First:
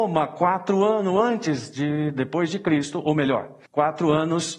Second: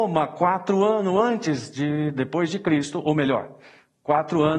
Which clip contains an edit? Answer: first; 1 cut; at 3.7 s

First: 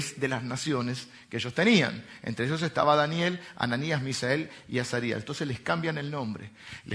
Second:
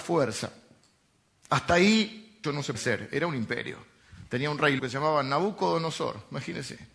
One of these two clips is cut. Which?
second; 3 cuts; at 2.4 s, 2.7 s, 4.8 s

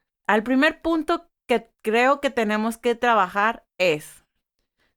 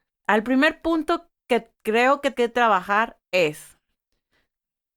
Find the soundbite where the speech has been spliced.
second; 1 cut; at 2.3 s

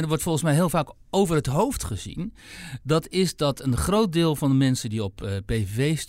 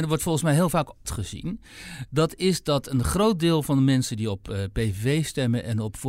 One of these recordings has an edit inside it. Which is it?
second; 1 cut; at 1.1 s

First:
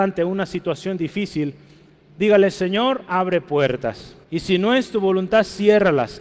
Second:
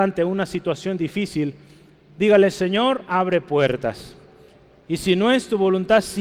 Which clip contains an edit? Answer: first; 1 cut; at 4.2 s

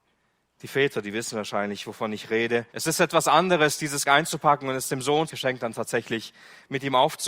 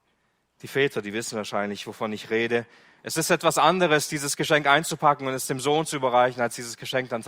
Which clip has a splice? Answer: first; 3 cuts; at 2.7 s, 4.0 s, 5.3 s

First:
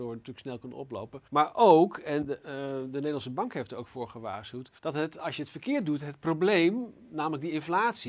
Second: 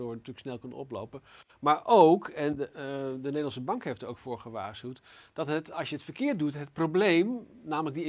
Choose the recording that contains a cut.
first; 2 cuts; at 1.3 s, 4.8 s

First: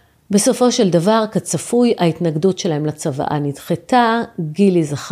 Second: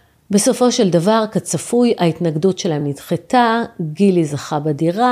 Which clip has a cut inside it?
second; 1 cut; at 2.8 s

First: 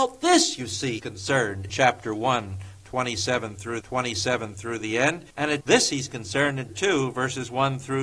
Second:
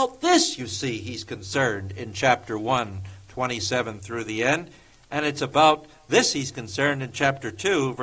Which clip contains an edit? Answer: first; 6 cuts; at 1.0 s, 1.7 s, 3.8 s, 5.3 s, 5.6 s, 6.7 s

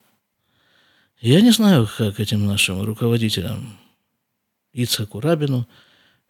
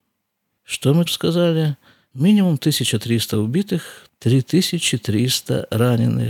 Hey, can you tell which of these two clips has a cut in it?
second; 2 cuts; at 1.1 s, 4.1 s

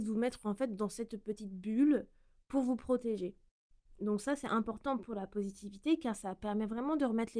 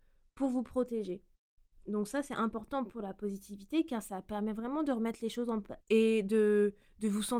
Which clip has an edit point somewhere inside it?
second; 1 cut; at 5.8 s

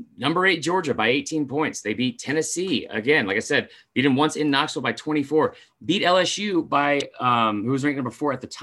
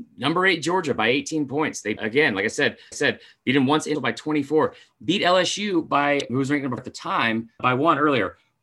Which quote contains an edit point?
second; 6 cuts; at 2.0 s, 2.9 s, 3.9 s, 6.3 s, 6.8 s, 7.6 s

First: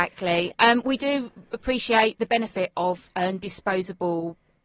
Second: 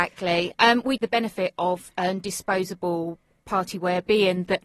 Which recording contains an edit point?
second; 1 cut; at 1.0 s

